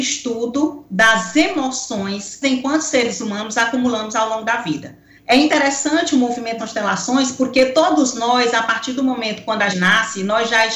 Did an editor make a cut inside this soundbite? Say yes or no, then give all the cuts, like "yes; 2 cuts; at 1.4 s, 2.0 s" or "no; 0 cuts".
yes; 4 cuts; at 2.4 s, 5.2 s, 6.6 s, 9.7 s